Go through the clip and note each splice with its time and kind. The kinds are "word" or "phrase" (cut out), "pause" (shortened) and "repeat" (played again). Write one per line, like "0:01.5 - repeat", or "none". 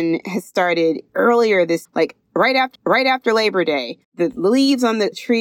0:01.1 - word
0:01.8 - word
0:02.7 - repeat
0:04.0 - pause